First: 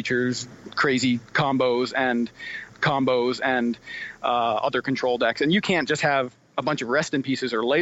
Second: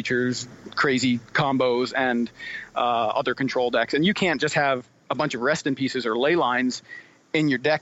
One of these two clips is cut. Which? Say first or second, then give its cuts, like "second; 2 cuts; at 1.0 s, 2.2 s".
first; 1 cut; at 2.7 s